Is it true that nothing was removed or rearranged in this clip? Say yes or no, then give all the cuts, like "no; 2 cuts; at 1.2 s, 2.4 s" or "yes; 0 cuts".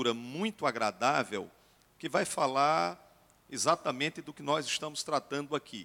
yes; 0 cuts